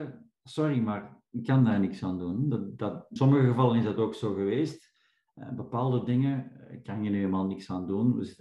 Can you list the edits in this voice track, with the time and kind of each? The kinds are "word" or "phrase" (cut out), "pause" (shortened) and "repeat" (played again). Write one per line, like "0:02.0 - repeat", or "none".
0:03.2 - word